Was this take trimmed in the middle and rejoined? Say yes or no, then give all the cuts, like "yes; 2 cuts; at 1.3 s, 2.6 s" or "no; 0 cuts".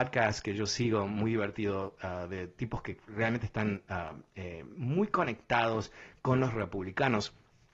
no; 0 cuts